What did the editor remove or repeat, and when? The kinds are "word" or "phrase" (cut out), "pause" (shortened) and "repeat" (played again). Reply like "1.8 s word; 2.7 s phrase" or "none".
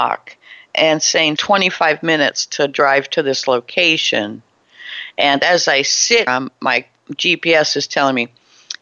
1.4 s phrase; 6.3 s word